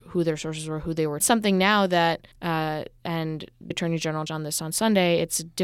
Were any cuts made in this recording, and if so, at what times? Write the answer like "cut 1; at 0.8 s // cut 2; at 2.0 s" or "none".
cut 1; at 1.2 s // cut 2; at 2.3 s // cut 3; at 3.7 s // cut 4; at 4.3 s